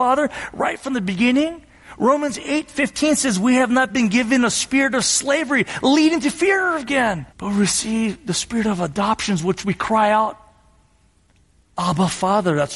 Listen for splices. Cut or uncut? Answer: cut